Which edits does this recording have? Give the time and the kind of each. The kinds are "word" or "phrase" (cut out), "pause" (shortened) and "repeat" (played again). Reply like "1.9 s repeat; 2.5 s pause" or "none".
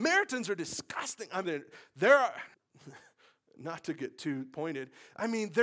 1.4 s word; 2.5 s pause